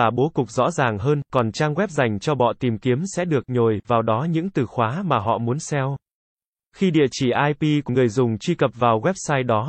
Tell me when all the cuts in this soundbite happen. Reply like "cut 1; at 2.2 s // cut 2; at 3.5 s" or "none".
cut 1; at 7.9 s